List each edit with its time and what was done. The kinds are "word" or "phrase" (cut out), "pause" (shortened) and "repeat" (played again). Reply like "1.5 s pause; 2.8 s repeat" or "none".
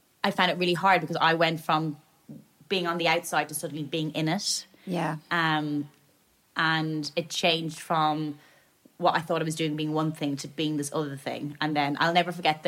none

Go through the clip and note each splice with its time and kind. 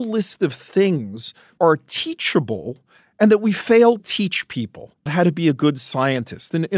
1.6 s word; 4.0 s word; 5.1 s word

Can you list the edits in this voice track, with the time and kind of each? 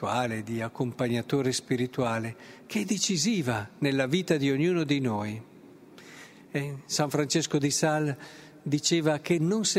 none

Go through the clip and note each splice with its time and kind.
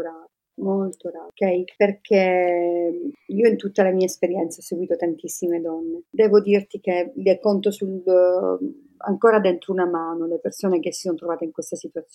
none

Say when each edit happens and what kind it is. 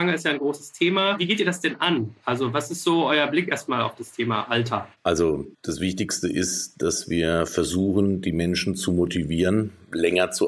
5.5 s pause

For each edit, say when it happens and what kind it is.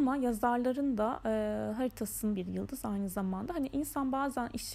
2.4 s word

